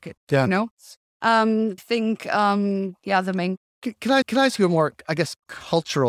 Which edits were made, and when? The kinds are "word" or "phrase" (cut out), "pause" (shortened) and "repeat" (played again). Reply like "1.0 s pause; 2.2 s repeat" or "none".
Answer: 1.8 s phrase; 4.2 s repeat